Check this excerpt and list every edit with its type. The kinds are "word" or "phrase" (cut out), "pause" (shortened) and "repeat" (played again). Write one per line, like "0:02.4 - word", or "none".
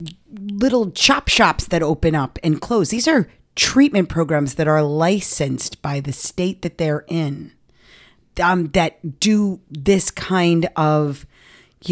none